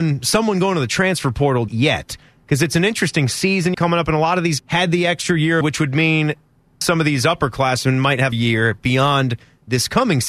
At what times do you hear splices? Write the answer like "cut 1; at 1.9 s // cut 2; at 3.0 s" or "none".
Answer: cut 1; at 1.7 s // cut 2; at 3.7 s // cut 3; at 4.6 s // cut 4; at 5.6 s // cut 5; at 6.8 s // cut 6; at 8.3 s